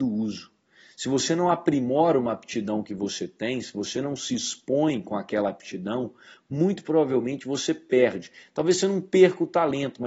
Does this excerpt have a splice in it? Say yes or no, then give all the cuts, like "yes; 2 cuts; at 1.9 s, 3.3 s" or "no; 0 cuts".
no; 0 cuts